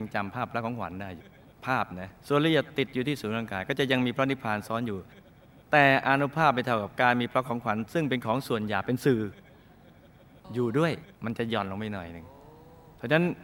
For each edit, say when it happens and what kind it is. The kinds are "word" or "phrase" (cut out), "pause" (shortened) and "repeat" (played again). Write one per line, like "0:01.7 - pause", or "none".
0:01.4 - pause
0:02.2 - pause
0:11.1 - pause